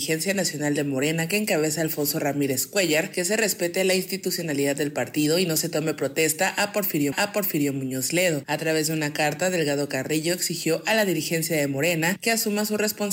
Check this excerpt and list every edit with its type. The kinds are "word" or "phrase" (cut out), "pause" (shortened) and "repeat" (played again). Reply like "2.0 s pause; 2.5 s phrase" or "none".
7.1 s repeat